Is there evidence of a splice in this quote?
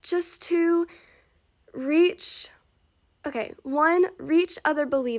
no; 0 cuts

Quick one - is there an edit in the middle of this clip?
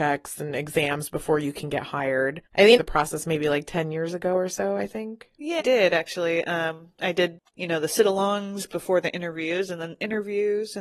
yes; 4 cuts; at 2.5 s, 2.8 s, 5.6 s, 7.5 s

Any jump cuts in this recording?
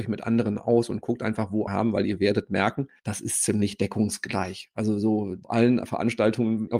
yes; 1 cut; at 1.7 s

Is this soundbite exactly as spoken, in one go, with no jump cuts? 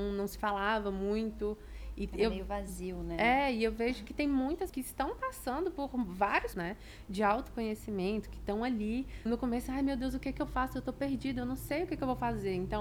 no; 3 cuts; at 4.7 s, 6.5 s, 9.3 s

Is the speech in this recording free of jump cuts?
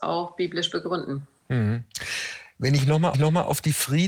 no; 1 cut; at 3.1 s

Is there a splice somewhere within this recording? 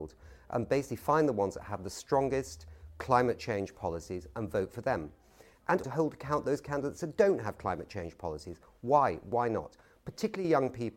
yes; 1 cut; at 5.8 s

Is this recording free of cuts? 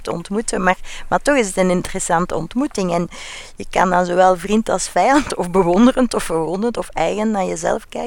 yes; 0 cuts

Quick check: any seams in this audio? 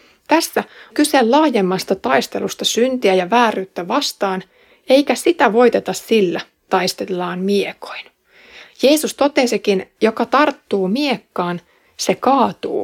yes; 2 cuts; at 0.9 s, 6.7 s

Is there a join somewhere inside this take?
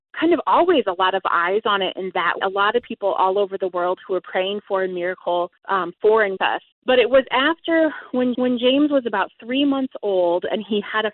yes; 5 cuts; at 2.4 s, 5.6 s, 6.4 s, 6.7 s, 8.3 s

